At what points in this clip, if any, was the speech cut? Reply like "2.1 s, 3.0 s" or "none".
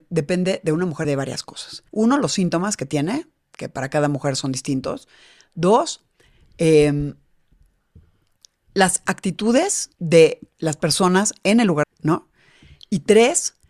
1.0 s, 1.9 s, 9.9 s, 11.8 s